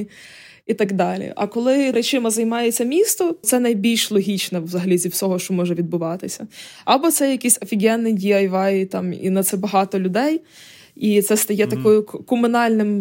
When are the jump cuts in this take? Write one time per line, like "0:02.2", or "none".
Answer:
0:01.9
0:03.4
0:09.5